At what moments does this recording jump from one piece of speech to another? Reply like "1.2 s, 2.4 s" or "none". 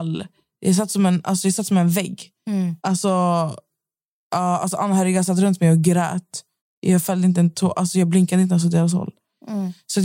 2.8 s, 6.6 s

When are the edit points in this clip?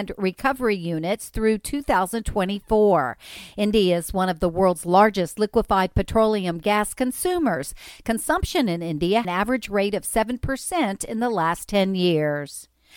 9.2 s

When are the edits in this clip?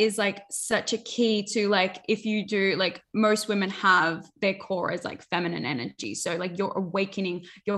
none

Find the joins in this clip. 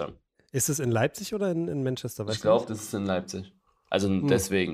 none

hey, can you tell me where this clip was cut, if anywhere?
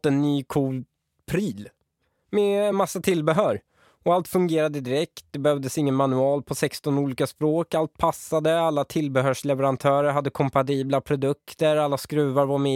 none

